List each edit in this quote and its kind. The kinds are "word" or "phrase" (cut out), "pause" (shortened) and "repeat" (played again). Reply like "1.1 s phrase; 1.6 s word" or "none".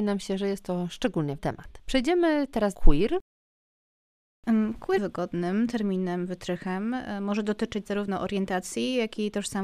1.4 s word; 2.7 s phrase; 5.0 s phrase